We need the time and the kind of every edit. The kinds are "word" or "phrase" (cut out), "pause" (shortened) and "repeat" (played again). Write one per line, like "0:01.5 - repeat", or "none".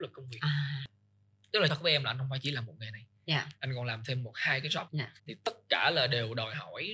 0:01.7 - phrase
0:03.6 - pause
0:04.9 - word
0:05.2 - pause